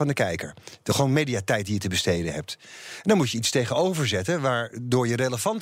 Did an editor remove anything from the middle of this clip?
no; 0 cuts

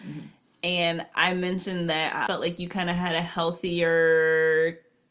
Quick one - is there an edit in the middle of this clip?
yes; 1 cut; at 2.3 s

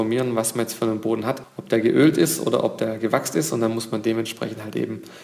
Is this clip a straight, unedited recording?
yes; 0 cuts

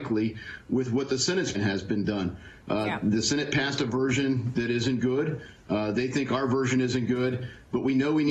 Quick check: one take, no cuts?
no; 1 cut; at 1.5 s

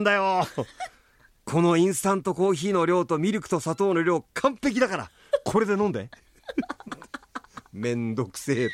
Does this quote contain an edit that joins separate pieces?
no; 0 cuts

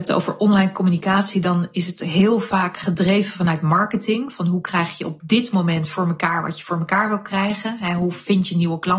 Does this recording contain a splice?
no; 0 cuts

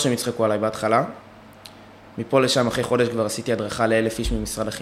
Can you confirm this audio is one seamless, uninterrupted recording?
yes; 0 cuts

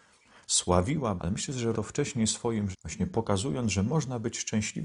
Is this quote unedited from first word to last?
no; 3 cuts; at 1.2 s, 1.7 s, 2.7 s

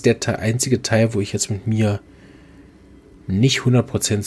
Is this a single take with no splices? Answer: yes; 0 cuts

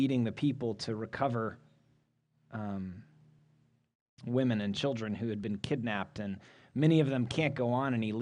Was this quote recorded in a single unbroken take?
yes; 0 cuts

